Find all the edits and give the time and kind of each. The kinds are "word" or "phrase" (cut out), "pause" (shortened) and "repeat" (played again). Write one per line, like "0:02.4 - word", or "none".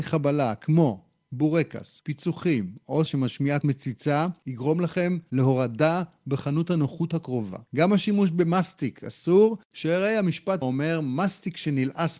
0:03.1 - word
0:03.6 - word
0:07.7 - pause
0:10.6 - word